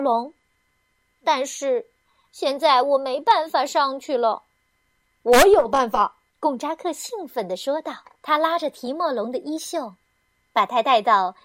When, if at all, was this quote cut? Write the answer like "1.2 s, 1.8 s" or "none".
2.0 s, 5.0 s, 6.3 s, 8.1 s